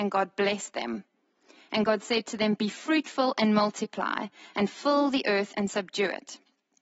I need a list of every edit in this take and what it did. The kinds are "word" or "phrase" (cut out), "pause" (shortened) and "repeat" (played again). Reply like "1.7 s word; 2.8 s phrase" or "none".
none